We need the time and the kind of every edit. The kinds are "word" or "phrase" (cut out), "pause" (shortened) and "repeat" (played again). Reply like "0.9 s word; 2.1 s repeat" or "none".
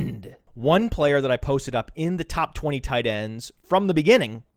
none